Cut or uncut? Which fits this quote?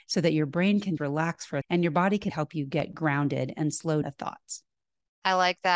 cut